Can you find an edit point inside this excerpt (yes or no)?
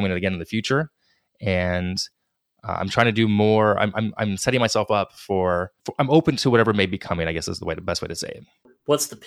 yes